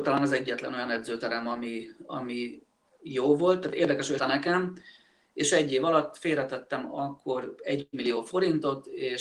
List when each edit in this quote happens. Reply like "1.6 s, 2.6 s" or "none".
4.2 s